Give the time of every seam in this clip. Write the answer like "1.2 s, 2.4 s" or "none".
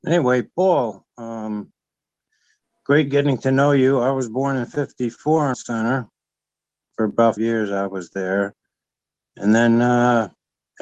5.5 s, 7.4 s